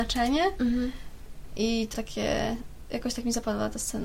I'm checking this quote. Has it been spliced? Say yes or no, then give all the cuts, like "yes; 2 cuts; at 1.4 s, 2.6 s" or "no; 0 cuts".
yes; 1 cut; at 1.9 s